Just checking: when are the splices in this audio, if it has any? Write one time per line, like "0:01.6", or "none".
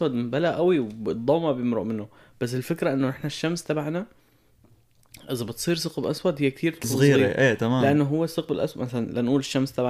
0:06.8